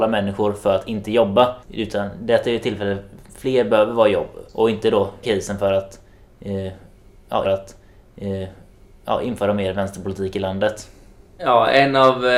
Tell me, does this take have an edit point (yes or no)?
yes